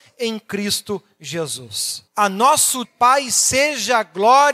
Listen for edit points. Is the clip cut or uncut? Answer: cut